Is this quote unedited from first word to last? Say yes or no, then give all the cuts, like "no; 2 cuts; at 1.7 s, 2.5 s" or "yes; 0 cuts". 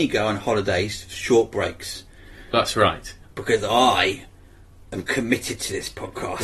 yes; 0 cuts